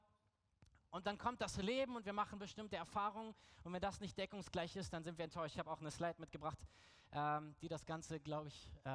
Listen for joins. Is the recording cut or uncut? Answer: uncut